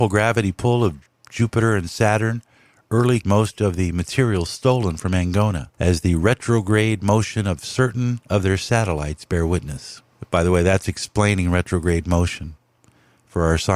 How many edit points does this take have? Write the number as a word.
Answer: three